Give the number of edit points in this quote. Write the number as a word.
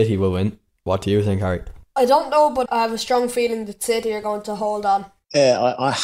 one